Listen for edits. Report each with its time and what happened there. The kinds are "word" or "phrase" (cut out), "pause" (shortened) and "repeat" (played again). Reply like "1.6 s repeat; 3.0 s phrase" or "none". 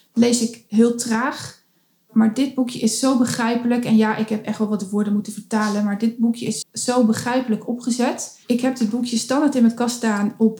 6.6 s word; 8.4 s pause

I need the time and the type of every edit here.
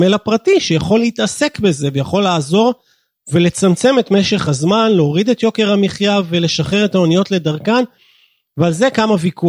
none

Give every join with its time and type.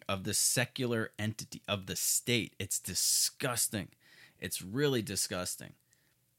none

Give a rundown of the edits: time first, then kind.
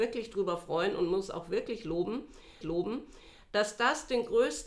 2.6 s repeat

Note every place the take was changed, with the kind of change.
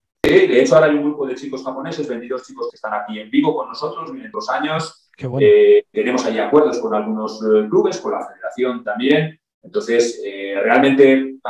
2.7 s word; 4.3 s word; 5.9 s word

